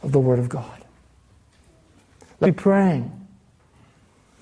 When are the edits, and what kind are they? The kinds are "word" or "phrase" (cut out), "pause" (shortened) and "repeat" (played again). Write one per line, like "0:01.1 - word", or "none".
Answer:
0:02.4 - word